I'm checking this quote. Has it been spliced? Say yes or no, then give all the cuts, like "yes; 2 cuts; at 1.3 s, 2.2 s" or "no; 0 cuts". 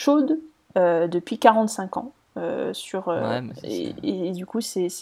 no; 0 cuts